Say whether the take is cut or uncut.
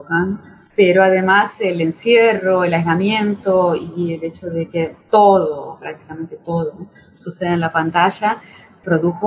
cut